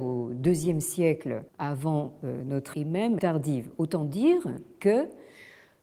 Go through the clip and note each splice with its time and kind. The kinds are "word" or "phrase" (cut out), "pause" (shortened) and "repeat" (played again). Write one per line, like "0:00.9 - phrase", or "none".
0:01.5 - pause
0:02.7 - word
0:03.2 - phrase